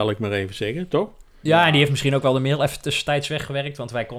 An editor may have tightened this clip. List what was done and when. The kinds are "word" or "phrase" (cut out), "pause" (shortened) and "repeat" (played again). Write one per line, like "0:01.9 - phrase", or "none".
none